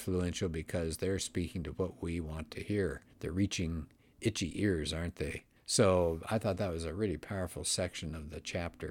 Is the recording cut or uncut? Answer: cut